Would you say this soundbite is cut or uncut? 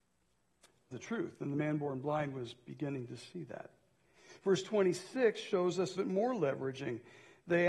cut